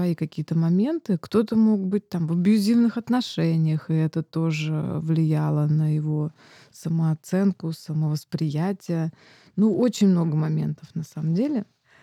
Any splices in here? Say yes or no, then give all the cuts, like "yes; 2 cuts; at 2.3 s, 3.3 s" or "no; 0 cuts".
no; 0 cuts